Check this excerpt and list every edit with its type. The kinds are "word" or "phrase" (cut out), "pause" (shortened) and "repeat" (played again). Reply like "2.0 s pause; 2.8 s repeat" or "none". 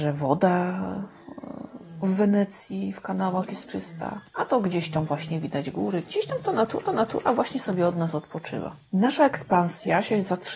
4.3 s pause; 6.9 s repeat